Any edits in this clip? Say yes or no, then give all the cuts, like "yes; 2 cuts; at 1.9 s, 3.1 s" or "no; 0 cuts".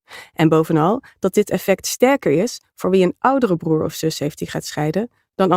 no; 0 cuts